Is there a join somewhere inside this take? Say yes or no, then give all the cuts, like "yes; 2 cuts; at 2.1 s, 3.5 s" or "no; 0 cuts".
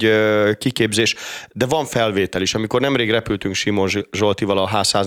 no; 0 cuts